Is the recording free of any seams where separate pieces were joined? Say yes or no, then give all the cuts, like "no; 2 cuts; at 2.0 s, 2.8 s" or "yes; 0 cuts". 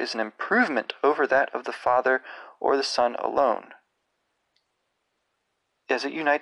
yes; 0 cuts